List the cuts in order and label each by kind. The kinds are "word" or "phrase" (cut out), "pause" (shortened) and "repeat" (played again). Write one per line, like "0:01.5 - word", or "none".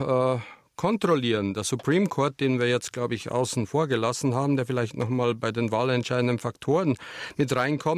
none